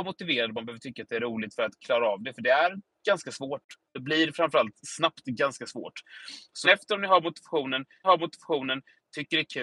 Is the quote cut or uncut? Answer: cut